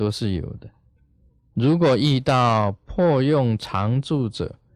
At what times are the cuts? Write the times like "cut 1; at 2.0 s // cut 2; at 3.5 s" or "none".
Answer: cut 1; at 1.0 s